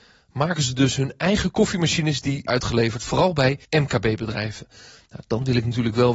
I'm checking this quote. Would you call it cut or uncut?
cut